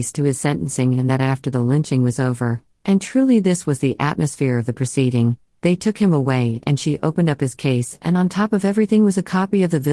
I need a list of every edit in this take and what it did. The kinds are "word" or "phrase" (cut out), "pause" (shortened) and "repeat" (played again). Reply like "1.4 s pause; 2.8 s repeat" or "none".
none

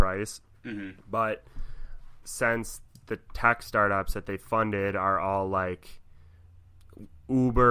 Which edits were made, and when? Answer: 1.0 s pause

